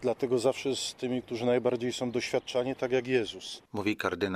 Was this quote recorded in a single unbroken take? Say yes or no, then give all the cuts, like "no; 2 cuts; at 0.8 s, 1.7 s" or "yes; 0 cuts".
yes; 0 cuts